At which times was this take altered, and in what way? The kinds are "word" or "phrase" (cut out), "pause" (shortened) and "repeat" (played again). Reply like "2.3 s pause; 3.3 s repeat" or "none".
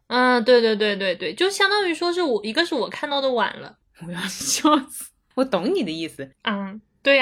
none